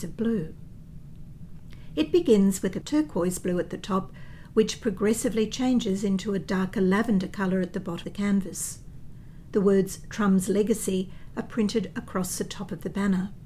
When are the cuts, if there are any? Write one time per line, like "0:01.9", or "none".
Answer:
0:02.8
0:08.0